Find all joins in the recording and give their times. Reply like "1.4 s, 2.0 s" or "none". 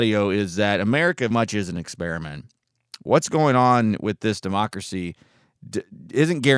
1.3 s